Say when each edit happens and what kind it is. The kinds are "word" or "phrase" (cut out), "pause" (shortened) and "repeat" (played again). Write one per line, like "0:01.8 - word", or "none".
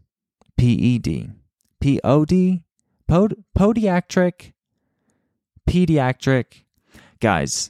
none

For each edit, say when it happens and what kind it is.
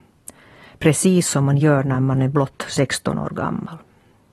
none

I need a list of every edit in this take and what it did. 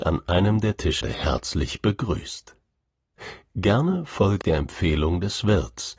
0:01.0 - phrase
0:04.4 - word

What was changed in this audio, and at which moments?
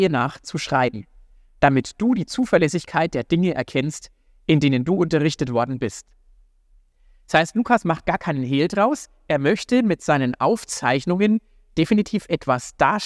none

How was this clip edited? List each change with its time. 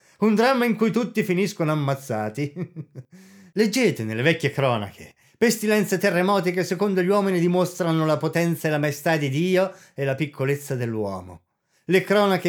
none

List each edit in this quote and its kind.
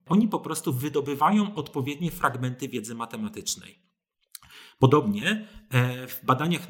none

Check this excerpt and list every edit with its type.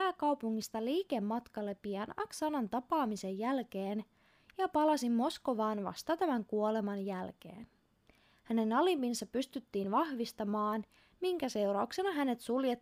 none

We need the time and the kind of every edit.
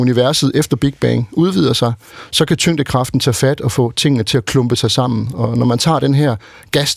none

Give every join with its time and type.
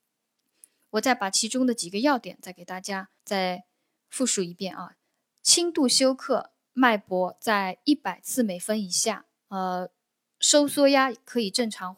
0:03.2 - pause
0:05.1 - pause
0:09.4 - pause

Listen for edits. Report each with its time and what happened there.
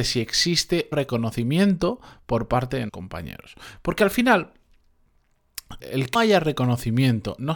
0:00.9 - phrase
0:02.9 - word
0:05.8 - word
0:06.2 - word

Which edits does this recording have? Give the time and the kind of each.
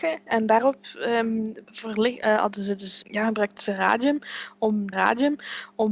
0:01.6 - pause
0:03.0 - word
0:04.9 - repeat

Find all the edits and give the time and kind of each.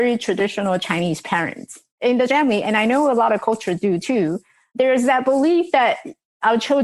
0:02.3 - word

